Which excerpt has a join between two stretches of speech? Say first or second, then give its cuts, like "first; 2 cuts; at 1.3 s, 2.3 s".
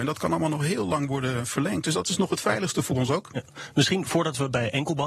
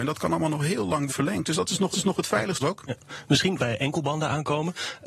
second; 4 cuts; at 1.1 s, 1.9 s, 2.6 s, 3.6 s